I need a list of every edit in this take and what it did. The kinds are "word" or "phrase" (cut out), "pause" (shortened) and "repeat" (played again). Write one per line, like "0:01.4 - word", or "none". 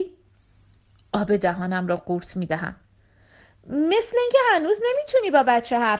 none